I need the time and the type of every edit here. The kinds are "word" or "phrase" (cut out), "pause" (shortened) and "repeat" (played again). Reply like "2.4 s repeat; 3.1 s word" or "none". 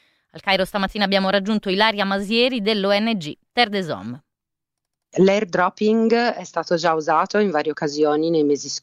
none